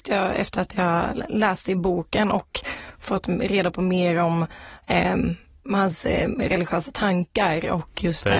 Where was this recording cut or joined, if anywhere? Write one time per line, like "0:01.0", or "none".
none